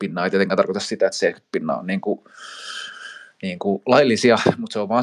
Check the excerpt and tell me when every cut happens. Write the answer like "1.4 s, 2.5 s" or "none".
none